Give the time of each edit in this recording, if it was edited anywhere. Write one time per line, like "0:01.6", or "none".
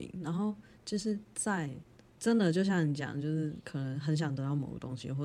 none